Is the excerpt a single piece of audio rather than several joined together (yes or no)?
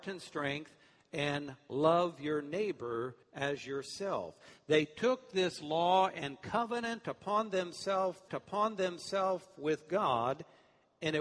no